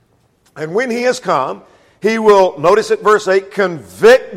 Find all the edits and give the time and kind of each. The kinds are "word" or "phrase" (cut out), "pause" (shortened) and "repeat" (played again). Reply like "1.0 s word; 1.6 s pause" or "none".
none